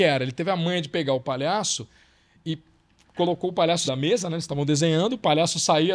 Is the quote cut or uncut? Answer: cut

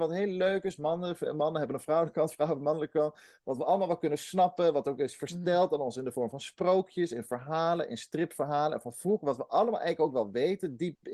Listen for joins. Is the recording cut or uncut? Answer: uncut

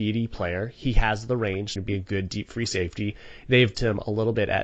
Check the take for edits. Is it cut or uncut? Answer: cut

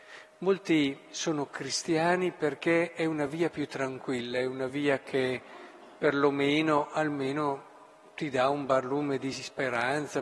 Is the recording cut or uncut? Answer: uncut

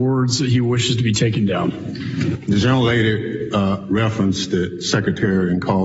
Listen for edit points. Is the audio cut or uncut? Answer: uncut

